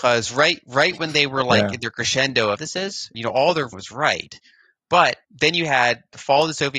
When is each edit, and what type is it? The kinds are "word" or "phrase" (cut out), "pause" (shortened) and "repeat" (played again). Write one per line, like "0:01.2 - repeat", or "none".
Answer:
0:02.6 - phrase
0:03.1 - word
0:03.7 - word
0:05.2 - pause